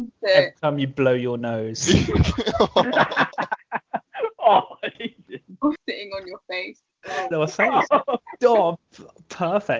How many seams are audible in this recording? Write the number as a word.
three